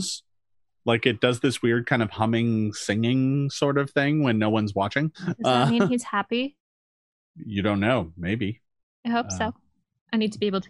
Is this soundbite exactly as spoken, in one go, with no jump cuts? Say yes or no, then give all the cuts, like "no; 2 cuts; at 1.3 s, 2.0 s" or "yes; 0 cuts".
no; 2 cuts; at 5.1 s, 7.2 s